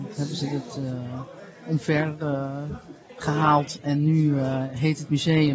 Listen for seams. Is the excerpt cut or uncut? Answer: cut